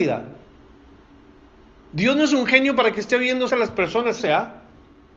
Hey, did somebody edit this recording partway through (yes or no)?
yes